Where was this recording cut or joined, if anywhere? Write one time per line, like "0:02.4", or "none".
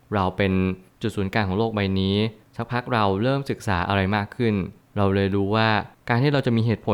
none